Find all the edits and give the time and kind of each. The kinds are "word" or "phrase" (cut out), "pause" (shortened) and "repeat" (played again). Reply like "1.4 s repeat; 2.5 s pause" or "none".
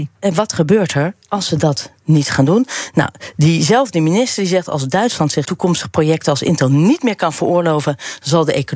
5.4 s word